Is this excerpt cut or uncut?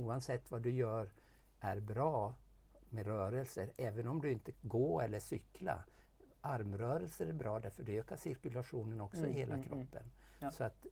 cut